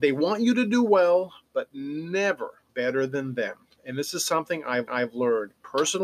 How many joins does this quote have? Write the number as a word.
two